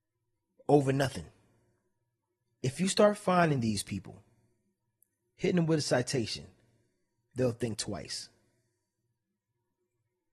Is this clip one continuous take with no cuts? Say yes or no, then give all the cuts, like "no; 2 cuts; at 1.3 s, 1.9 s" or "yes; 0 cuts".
yes; 0 cuts